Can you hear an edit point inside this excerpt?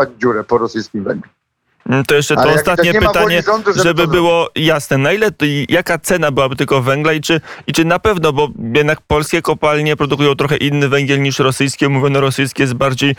no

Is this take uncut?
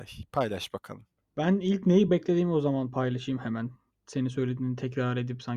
yes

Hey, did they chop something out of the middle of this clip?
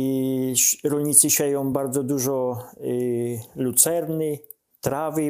no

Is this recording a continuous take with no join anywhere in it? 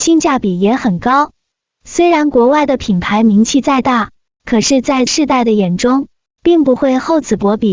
no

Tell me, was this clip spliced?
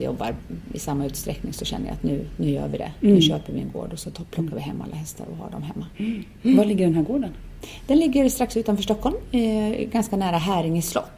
no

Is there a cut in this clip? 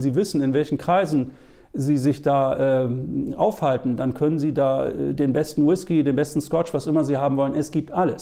no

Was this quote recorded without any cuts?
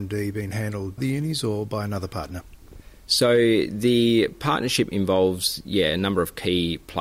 no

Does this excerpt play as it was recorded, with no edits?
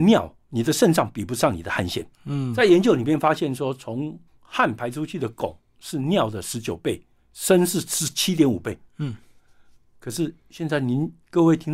no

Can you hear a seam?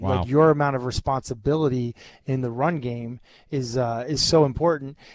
no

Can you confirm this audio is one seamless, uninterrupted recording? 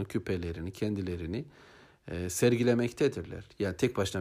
yes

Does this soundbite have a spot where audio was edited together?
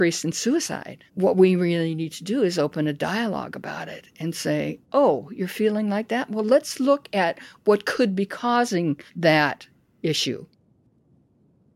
yes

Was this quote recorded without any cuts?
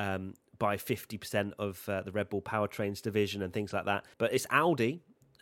no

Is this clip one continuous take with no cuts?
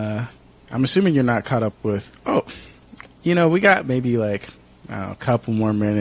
yes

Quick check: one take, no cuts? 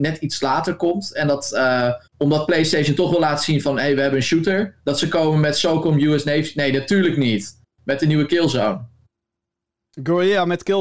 no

